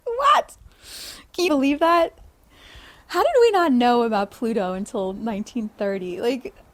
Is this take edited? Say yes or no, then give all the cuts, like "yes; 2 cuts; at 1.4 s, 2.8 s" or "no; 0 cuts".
yes; 1 cut; at 1.5 s